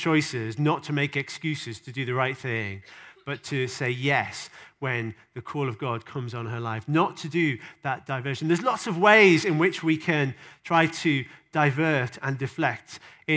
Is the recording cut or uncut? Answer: uncut